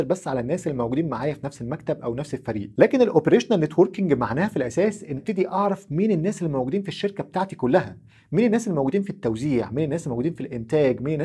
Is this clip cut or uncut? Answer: cut